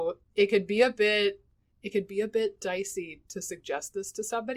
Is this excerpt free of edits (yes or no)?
yes